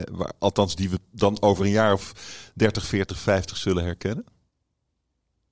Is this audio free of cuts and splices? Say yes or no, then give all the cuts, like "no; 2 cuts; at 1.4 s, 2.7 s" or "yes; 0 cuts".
yes; 0 cuts